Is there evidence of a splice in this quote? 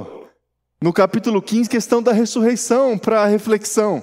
yes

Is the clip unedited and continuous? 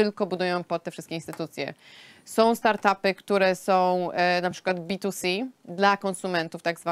yes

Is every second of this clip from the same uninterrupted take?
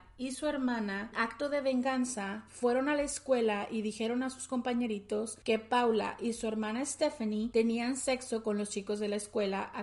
no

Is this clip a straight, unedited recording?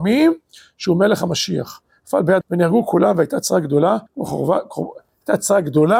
no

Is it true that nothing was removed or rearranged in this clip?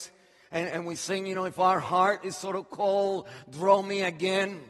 yes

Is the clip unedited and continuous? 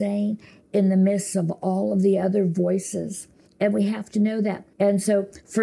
no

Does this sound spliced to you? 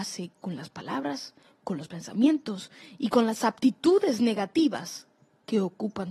no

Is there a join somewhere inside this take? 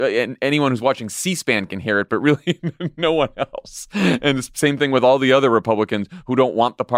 no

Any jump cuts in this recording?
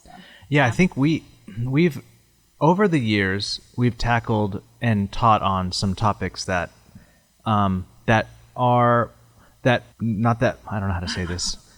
yes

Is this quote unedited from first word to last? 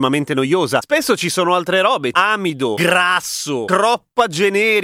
no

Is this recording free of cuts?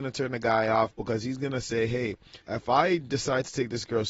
no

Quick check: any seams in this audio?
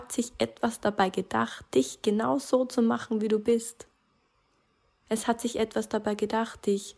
no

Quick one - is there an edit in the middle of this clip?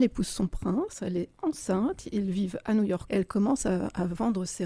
yes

